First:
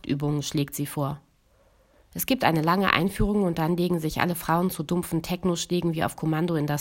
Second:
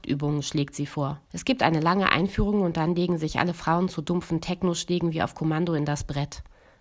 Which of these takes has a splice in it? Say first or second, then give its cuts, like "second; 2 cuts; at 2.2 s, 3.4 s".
second; 1 cut; at 1.3 s